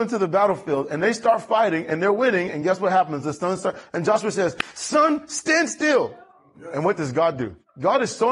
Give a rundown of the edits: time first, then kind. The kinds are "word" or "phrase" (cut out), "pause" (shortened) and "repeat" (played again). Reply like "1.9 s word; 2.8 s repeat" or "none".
none